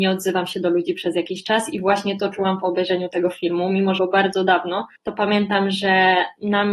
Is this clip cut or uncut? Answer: cut